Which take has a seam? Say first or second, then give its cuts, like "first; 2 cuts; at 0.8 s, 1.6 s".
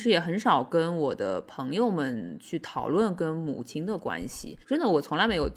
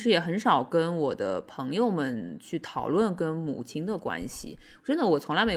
first; 1 cut; at 4.6 s